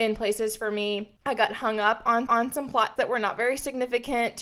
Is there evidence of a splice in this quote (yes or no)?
yes